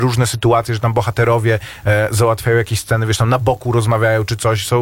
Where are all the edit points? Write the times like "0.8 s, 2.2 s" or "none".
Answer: none

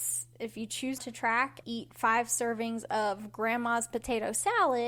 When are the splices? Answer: 1.0 s, 1.6 s

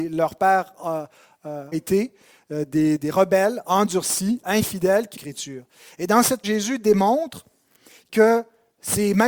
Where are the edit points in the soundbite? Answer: 1.7 s, 3.0 s, 5.1 s, 6.4 s

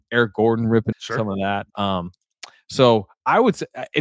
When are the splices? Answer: 0.9 s, 1.7 s

